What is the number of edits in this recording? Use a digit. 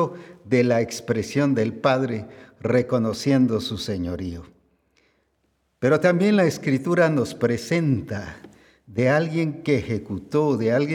0